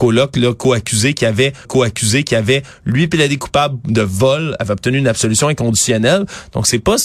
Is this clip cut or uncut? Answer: cut